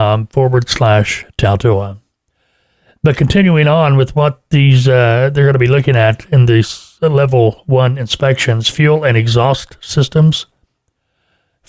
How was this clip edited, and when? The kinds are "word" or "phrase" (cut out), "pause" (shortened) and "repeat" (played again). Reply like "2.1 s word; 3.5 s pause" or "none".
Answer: none